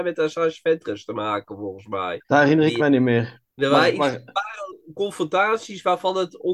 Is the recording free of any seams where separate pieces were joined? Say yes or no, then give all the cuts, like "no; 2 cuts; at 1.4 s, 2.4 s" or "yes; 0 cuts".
no; 2 cuts; at 2.2 s, 3.5 s